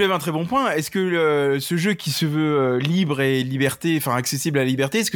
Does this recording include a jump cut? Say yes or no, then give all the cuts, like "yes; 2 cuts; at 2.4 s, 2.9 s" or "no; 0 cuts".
no; 0 cuts